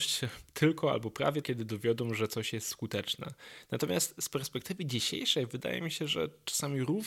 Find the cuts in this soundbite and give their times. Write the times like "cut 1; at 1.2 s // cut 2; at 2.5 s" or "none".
cut 1; at 1.4 s